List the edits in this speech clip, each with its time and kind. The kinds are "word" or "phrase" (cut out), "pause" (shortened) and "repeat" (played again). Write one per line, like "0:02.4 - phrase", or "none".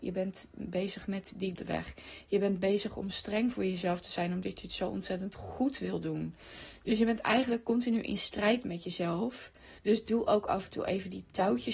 0:01.5 - phrase
0:09.8 - pause